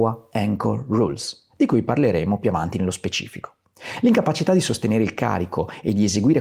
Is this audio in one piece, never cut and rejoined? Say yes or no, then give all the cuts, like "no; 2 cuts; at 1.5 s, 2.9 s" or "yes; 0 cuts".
yes; 0 cuts